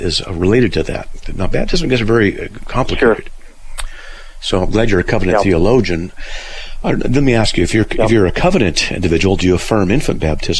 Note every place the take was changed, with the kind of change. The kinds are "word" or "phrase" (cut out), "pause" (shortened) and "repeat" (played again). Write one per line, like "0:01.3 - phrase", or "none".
none